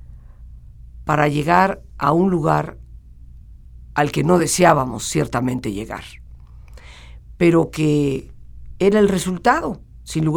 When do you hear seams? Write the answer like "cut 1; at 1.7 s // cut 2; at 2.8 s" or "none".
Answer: none

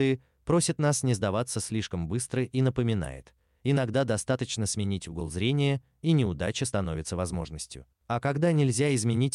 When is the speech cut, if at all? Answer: cut 1; at 7.9 s

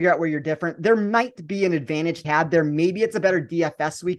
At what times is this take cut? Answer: cut 1; at 2.2 s

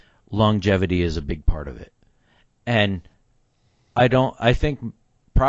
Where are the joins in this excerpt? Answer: none

